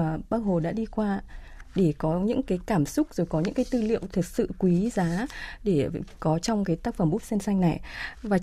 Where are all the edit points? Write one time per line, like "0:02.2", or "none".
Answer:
none